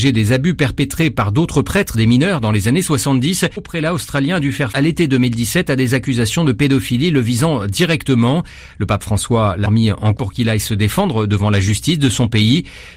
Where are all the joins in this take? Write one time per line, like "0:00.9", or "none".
0:01.9
0:03.6
0:04.7
0:09.6
0:10.2